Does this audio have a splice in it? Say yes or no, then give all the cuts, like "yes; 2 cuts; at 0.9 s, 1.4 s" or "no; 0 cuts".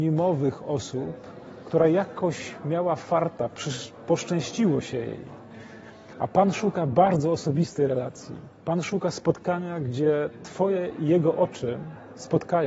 yes; 1 cut; at 8.5 s